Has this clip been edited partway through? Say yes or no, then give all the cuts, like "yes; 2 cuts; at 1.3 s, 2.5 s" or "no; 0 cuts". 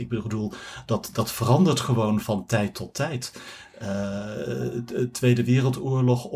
yes; 1 cut; at 2.2 s